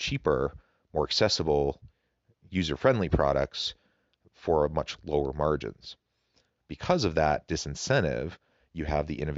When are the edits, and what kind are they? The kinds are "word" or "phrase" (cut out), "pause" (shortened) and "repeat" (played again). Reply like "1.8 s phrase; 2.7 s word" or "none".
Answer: none